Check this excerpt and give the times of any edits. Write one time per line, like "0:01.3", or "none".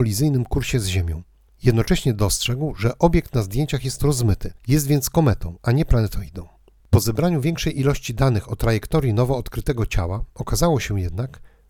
0:01.5
0:04.6